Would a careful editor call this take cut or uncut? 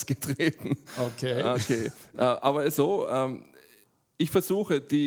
cut